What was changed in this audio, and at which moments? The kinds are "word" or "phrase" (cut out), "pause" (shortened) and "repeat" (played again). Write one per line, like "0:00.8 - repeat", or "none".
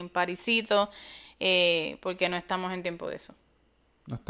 none